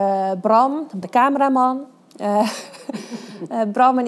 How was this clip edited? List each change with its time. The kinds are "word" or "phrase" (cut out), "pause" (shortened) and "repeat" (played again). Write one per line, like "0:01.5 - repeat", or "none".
0:01.0 - word